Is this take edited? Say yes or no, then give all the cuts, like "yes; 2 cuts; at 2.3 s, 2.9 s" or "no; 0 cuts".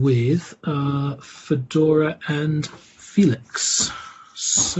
no; 0 cuts